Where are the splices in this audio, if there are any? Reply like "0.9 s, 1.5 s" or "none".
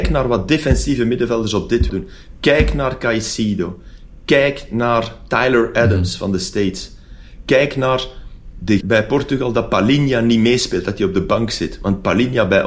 1.9 s, 8.8 s